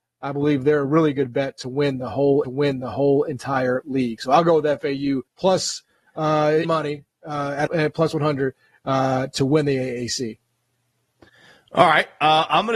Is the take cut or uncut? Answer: cut